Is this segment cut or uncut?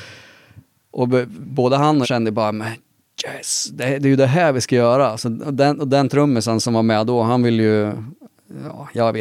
cut